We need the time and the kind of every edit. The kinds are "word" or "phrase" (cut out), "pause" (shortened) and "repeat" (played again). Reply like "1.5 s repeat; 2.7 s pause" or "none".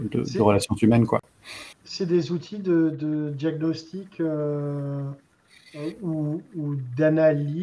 1.7 s pause